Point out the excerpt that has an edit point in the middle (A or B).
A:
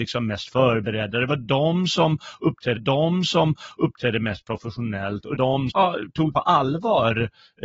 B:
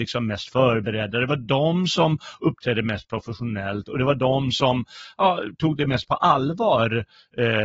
A